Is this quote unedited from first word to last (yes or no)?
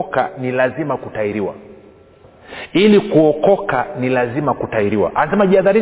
yes